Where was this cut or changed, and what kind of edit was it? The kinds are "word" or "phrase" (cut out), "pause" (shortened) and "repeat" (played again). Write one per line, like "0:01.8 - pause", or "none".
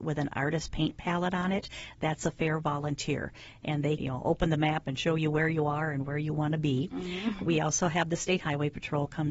0:04.0 - word
0:07.4 - word